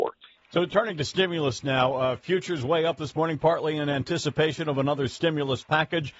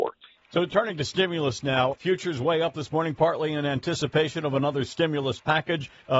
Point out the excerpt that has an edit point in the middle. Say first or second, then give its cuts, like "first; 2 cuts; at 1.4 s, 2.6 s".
second; 1 cut; at 1.9 s